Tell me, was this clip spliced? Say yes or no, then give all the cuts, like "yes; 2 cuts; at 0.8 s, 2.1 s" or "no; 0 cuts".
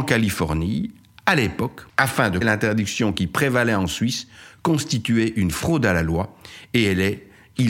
yes; 2 cuts; at 1.9 s, 2.4 s